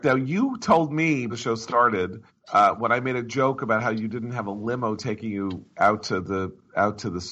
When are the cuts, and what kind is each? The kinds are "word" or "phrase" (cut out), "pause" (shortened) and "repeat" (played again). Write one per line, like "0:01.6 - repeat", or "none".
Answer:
0:01.3 - word
0:02.3 - pause

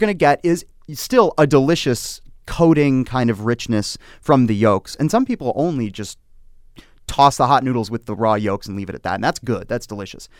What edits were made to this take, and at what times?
none

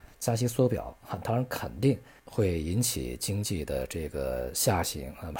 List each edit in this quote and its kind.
0:02.2 - pause

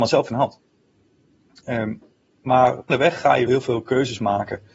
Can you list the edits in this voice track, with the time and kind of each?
0:02.9 - word
0:03.5 - word

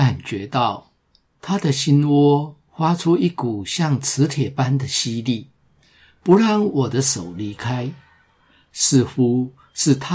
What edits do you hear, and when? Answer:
none

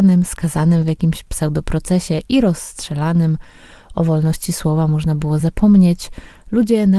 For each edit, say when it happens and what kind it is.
none

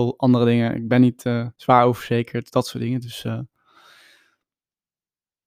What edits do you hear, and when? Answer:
0:01.5 - pause

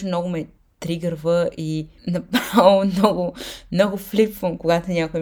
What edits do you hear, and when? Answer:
0:02.0 - pause

